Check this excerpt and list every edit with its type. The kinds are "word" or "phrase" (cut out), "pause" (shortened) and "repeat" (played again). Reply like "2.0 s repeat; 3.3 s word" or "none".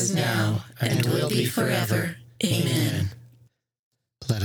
none